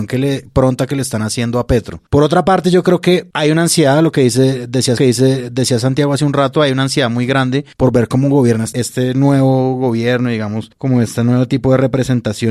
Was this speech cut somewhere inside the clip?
yes; 4 cuts; at 2.1 s, 3.3 s, 5.0 s, 7.7 s

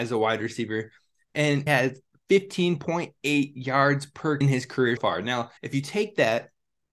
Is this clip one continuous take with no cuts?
no; 4 cuts; at 1.7 s, 4.4 s, 5.0 s, 5.6 s

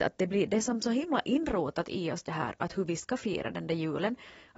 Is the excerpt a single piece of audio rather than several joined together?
yes; 0 cuts

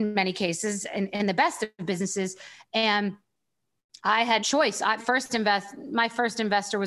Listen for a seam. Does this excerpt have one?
yes; 2 cuts; at 4.4 s, 5.0 s

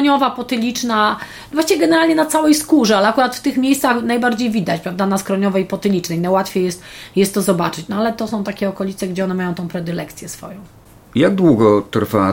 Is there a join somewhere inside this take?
no; 0 cuts

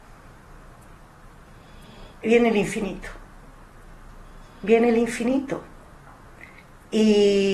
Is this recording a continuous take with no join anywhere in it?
yes; 0 cuts

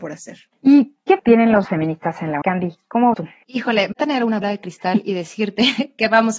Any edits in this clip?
yes; 6 cuts; at 1.2 s, 1.6 s, 2.4 s, 3.1 s, 3.9 s, 4.4 s

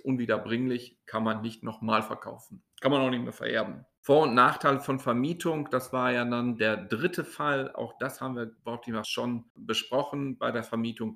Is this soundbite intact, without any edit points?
no; 3 cuts; at 1.0 s, 8.6 s, 9.0 s

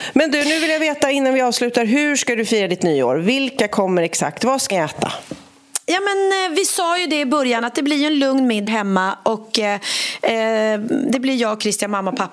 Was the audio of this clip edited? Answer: yes; 2 cuts; at 4.7 s, 8.7 s

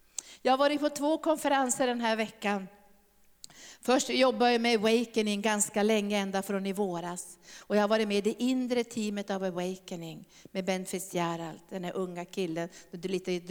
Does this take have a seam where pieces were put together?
no; 0 cuts

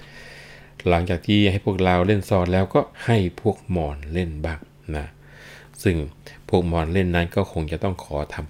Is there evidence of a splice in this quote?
yes; 1 cut; at 2.9 s

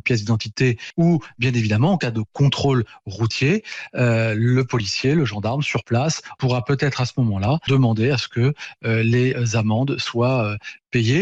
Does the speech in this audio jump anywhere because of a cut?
no; 0 cuts

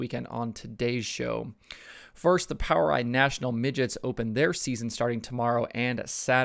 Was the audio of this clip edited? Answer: no; 0 cuts

